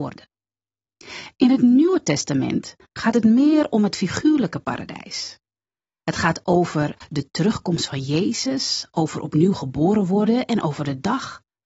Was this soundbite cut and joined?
no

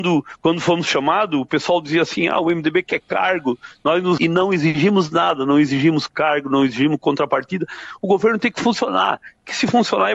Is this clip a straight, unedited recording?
no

